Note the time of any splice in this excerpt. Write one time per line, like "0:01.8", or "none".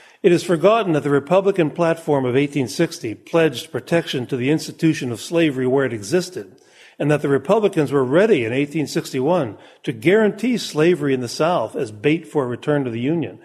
none